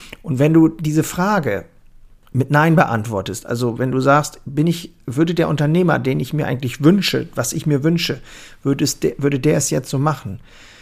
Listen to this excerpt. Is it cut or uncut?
uncut